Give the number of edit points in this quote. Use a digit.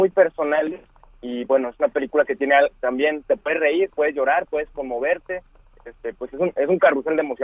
0